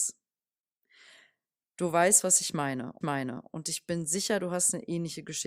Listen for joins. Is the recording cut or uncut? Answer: cut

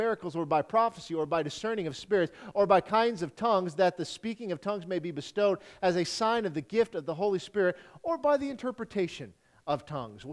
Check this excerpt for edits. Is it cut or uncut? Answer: uncut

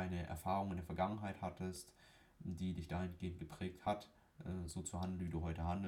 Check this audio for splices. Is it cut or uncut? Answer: uncut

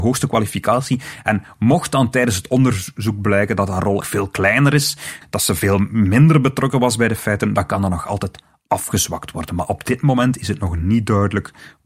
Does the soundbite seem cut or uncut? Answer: cut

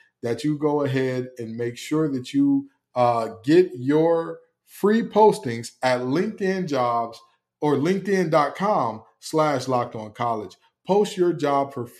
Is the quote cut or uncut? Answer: uncut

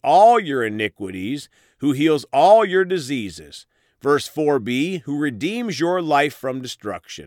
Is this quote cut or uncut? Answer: uncut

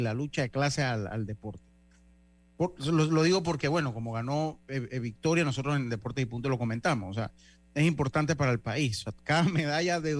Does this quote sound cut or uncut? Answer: uncut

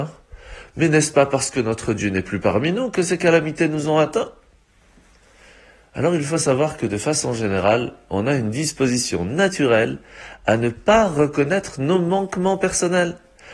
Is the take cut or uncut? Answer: uncut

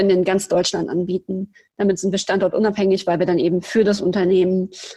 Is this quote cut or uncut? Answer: uncut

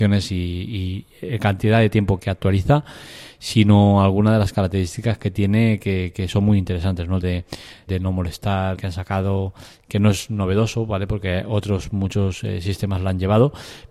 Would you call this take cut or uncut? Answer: cut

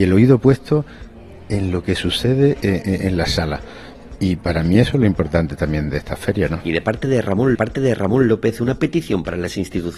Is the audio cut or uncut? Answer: cut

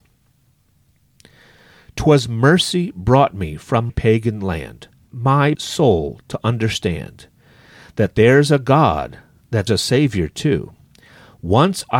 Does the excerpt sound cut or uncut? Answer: cut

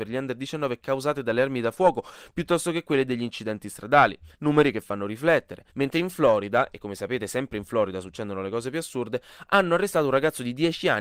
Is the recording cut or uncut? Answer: cut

